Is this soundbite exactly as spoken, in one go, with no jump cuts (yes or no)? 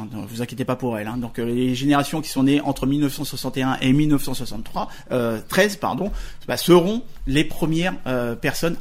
yes